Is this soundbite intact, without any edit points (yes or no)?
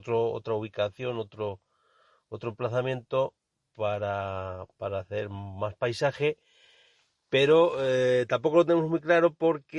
yes